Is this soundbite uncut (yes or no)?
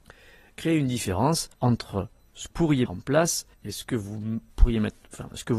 no